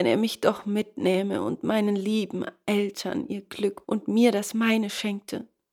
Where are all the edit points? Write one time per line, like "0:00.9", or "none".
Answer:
0:03.8

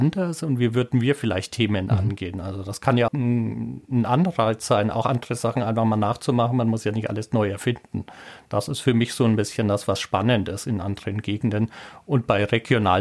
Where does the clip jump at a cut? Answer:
0:03.1

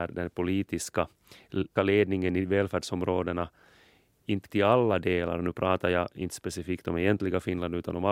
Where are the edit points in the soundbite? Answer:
0:01.8
0:04.5

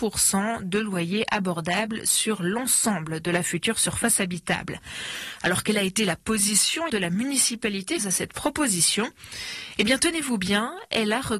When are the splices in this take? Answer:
0:06.9
0:08.0

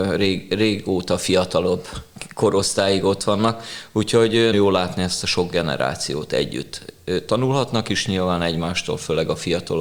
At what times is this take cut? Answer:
0:04.5

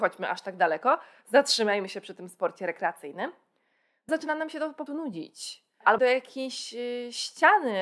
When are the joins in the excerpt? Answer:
0:04.1
0:04.9
0:06.0

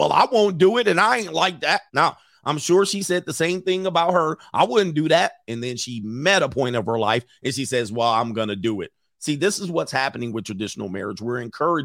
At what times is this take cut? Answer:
0:01.9

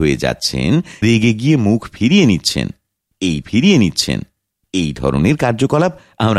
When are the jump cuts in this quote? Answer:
0:01.0
0:03.4

